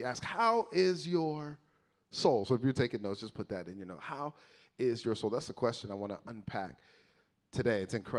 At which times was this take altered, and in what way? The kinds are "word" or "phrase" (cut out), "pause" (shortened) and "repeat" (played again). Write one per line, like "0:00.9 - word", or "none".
none